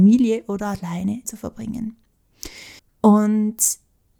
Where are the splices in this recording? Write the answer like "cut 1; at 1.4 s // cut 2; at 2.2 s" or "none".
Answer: cut 1; at 1.2 s // cut 2; at 2.8 s